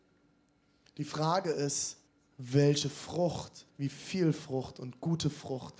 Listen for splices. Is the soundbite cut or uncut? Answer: cut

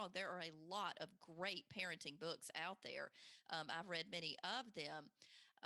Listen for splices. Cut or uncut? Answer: uncut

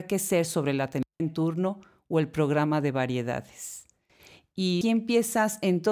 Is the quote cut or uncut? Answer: cut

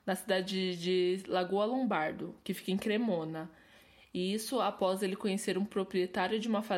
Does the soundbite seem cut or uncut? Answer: uncut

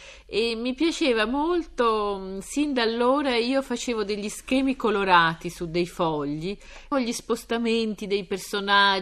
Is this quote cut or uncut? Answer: cut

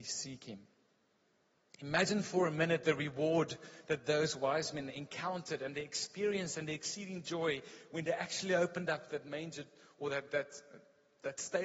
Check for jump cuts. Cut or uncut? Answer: uncut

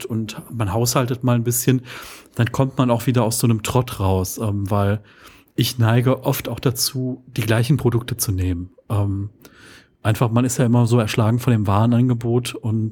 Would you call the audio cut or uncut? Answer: uncut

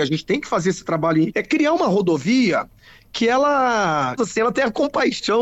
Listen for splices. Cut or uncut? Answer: cut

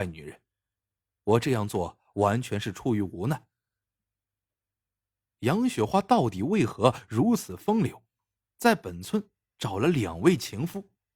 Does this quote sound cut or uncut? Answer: uncut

